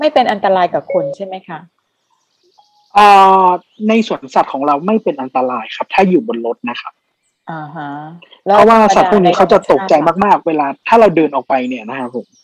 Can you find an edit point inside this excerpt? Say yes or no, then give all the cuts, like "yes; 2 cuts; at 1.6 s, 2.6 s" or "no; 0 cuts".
no; 0 cuts